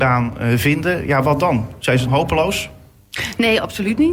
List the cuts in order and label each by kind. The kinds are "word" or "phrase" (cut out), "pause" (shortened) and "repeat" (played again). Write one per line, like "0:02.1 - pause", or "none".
0:02.1 - word